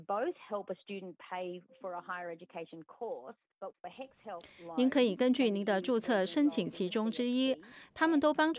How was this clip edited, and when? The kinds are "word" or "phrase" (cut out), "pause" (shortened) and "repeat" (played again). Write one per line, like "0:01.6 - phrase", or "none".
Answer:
none